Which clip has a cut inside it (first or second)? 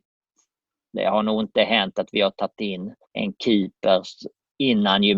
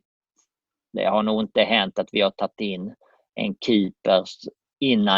first